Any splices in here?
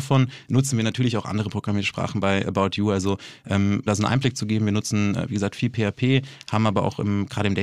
yes; 1 cut; at 3.9 s

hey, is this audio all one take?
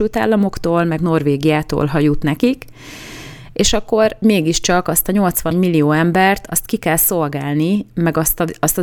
no; 3 cuts; at 1.0 s, 4.2 s, 5.5 s

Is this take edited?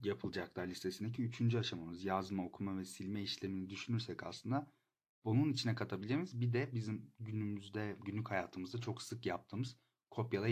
no; 0 cuts

